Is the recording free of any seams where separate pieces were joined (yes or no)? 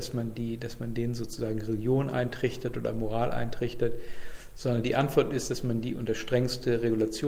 yes